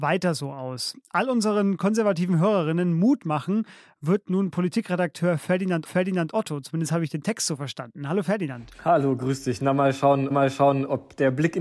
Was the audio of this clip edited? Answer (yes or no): yes